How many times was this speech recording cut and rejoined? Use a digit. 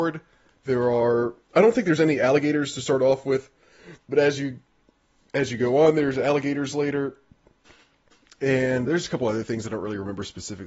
3